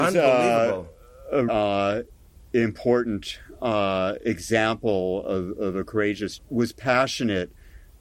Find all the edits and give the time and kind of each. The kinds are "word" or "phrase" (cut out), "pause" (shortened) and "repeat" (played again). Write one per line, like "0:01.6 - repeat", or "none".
0:01.5 - word
0:06.4 - phrase